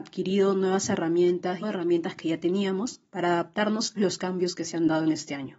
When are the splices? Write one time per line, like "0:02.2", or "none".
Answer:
0:01.6
0:04.0